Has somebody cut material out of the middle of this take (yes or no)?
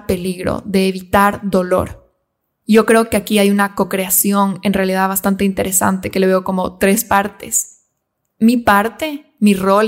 no